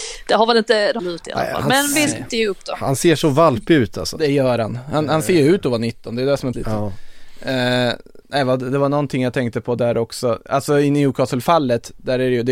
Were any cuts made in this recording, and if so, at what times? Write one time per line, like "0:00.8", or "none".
0:01.0
0:02.3
0:06.5
0:08.2